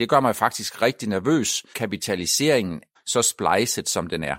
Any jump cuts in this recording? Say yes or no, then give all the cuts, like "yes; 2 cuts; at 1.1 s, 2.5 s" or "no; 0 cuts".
yes; 2 cuts; at 1.7 s, 3.0 s